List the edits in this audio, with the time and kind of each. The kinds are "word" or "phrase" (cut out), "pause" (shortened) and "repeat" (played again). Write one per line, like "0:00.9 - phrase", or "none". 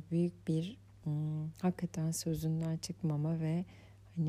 none